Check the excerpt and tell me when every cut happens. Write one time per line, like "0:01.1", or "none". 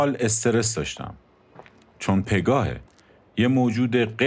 0:02.2